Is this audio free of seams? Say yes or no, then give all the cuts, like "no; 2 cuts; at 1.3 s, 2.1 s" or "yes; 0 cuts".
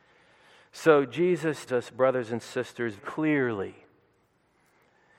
no; 2 cuts; at 1.7 s, 3.0 s